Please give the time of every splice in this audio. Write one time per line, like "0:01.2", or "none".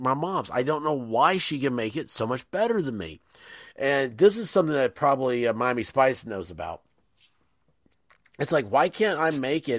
none